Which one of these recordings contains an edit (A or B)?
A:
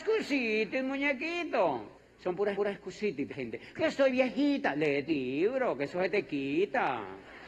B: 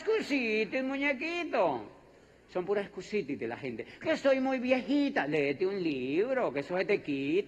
A